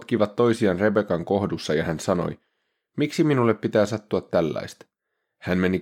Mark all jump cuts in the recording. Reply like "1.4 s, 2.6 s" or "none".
none